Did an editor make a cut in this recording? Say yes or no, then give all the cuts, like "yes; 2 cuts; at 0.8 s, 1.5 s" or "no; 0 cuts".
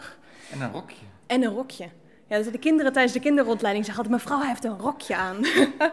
no; 0 cuts